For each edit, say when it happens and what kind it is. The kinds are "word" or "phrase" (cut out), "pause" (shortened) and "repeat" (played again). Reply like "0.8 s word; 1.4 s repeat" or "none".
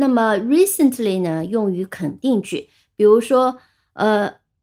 none